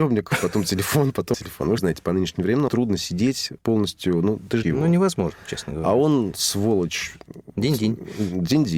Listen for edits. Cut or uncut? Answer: cut